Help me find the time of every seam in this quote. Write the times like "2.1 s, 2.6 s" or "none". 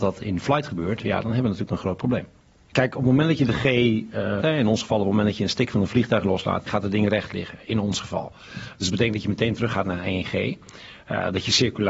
4.4 s